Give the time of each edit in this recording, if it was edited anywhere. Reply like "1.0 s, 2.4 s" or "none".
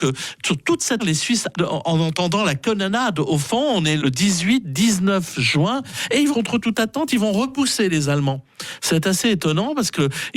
1.0 s, 1.5 s, 4.0 s, 6.3 s